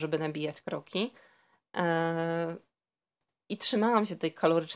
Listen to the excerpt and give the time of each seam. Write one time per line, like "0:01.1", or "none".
none